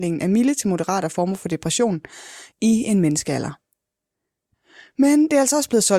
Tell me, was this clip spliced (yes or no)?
yes